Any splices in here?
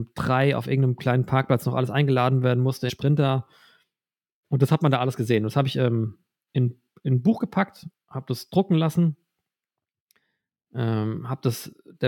yes; 1 cut; at 2.9 s

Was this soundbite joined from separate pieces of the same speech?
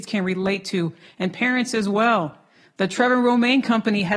no; 0 cuts

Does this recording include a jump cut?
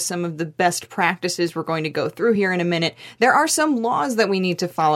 no; 0 cuts

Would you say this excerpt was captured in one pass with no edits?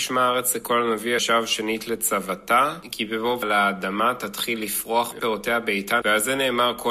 no; 4 cuts; at 1.2 s, 3.4 s, 5.2 s, 6.0 s

